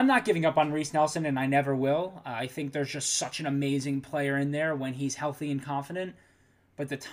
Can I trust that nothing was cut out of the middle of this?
yes; 0 cuts

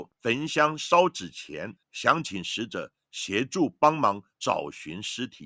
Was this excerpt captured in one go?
no; 1 cut; at 1.8 s

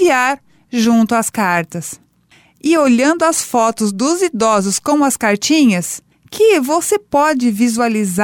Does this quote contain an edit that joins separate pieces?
no; 0 cuts

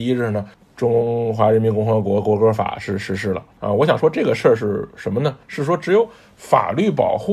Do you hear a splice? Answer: yes; 1 cut; at 5.4 s

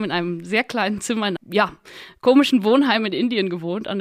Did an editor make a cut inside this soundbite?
yes; 1 cut; at 1.4 s

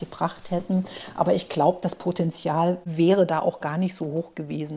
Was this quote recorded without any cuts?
yes; 0 cuts

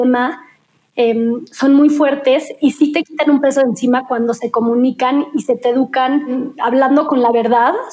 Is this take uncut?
yes; 0 cuts

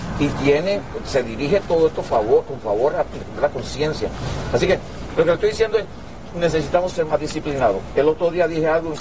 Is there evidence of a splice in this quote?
no; 0 cuts

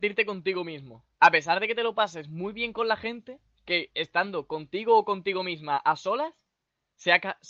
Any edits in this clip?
no; 0 cuts

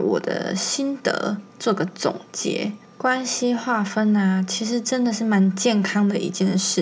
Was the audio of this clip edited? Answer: yes; 1 cut; at 1.5 s

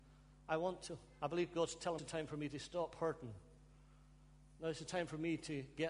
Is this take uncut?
no; 1 cut; at 2.0 s

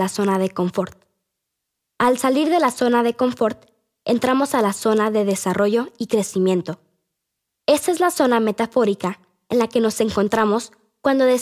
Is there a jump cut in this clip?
no; 0 cuts

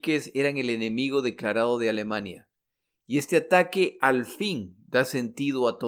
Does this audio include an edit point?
no; 0 cuts

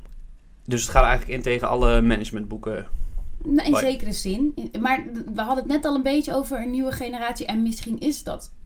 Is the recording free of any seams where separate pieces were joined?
yes; 0 cuts

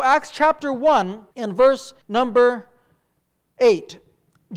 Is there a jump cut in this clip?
yes; 2 cuts; at 1.3 s, 2.0 s

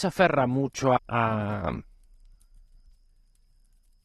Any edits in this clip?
yes; 1 cut; at 1.0 s

